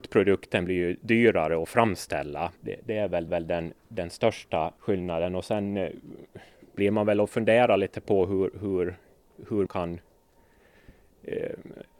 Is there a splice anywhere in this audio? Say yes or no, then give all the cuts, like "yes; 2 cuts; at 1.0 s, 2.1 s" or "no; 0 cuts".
yes; 4 cuts; at 2.6 s, 3.3 s, 4.8 s, 9.7 s